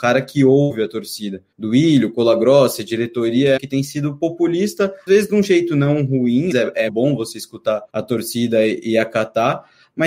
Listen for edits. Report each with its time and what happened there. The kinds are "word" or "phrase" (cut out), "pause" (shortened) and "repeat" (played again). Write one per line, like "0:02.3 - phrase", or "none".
0:01.5 - pause
0:03.6 - phrase
0:05.1 - word
0:06.5 - phrase
0:06.9 - word
0:07.9 - pause